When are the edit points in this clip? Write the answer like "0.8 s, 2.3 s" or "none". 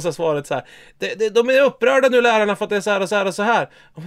3.1 s